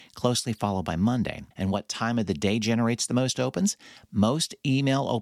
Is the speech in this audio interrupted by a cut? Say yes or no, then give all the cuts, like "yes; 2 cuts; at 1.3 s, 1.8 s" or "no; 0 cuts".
yes; 1 cut; at 1.5 s